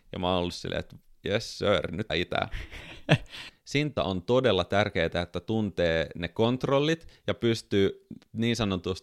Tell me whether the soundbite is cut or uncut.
cut